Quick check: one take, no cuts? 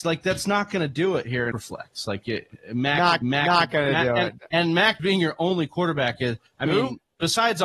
no; 4 cuts; at 1.5 s, 3.2 s, 5.0 s, 6.5 s

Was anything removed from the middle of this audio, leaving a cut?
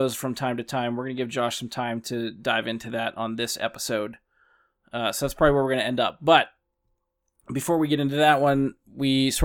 no; 0 cuts

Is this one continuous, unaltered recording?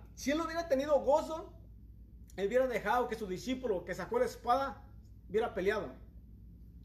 yes; 0 cuts

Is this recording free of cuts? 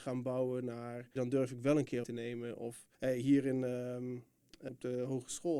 no; 4 cuts; at 1.2 s, 2.0 s, 2.9 s, 4.7 s

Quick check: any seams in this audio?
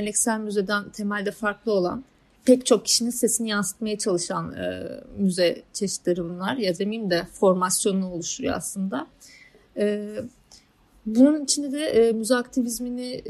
yes; 2 cuts; at 2.3 s, 6.8 s

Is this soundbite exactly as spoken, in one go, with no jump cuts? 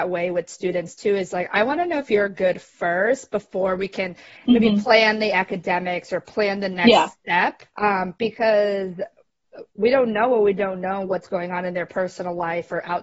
no; 2 cuts; at 7.7 s, 9.7 s

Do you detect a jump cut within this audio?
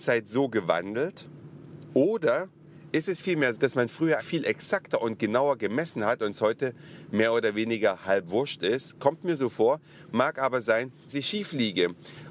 yes; 3 cuts; at 3.5 s, 4.2 s, 11.1 s

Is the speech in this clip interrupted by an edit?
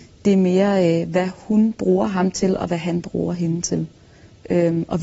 no; 0 cuts

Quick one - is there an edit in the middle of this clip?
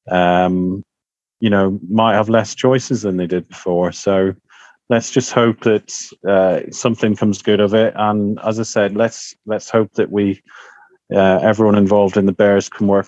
no; 0 cuts

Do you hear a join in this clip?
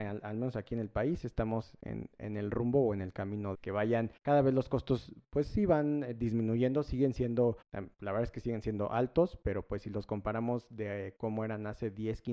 yes; 3 cuts; at 3.5 s, 4.2 s, 7.6 s

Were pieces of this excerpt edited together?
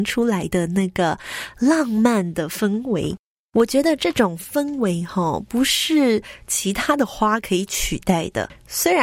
no; 0 cuts

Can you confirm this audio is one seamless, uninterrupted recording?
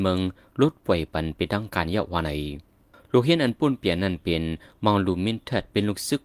yes; 0 cuts

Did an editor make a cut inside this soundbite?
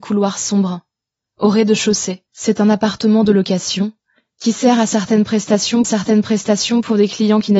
yes; 2 cuts; at 2.3 s, 5.8 s

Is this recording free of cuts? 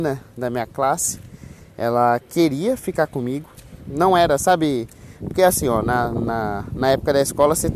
yes; 0 cuts

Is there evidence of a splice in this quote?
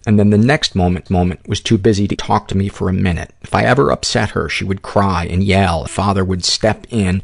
yes; 3 cuts; at 1.1 s, 2.2 s, 5.9 s

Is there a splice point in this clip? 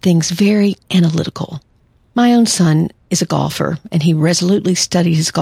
no; 0 cuts

